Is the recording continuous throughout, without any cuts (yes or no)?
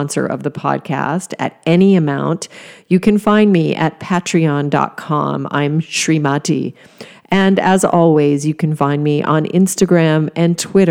yes